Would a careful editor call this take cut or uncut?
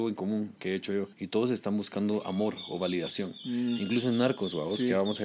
cut